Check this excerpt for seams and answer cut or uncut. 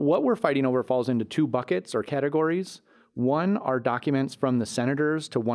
uncut